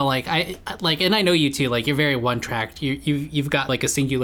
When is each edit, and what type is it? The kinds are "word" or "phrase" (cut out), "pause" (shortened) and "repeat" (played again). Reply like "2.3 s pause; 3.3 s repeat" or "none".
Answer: none